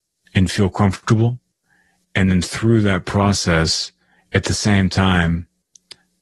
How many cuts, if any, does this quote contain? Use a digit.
0